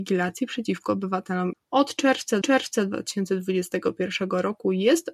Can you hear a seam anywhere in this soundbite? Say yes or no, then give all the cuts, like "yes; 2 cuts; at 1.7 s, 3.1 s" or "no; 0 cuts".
yes; 2 cuts; at 1.5 s, 2.4 s